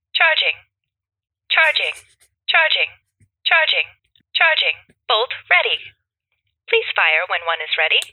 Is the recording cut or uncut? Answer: uncut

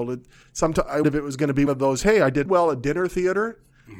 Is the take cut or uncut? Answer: cut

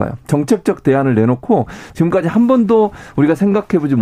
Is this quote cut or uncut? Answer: uncut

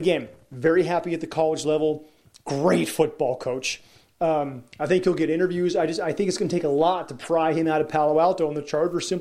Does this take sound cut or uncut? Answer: uncut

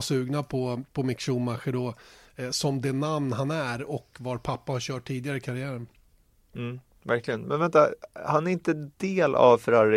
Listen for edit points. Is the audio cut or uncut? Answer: uncut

